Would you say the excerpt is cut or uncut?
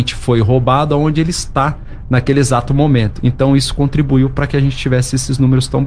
uncut